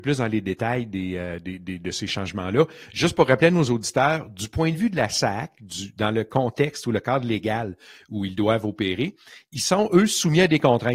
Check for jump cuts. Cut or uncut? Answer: uncut